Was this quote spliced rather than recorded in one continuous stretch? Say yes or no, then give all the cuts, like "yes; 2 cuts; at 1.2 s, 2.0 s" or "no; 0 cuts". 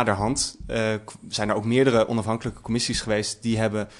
no; 0 cuts